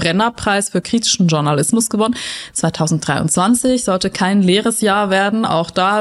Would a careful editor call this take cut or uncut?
uncut